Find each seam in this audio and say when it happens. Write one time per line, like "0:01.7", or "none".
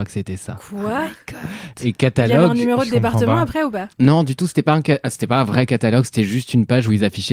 0:03.9